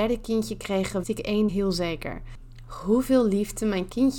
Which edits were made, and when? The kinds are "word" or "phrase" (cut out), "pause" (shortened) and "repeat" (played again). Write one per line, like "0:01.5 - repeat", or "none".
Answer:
0:01.0 - word
0:01.5 - word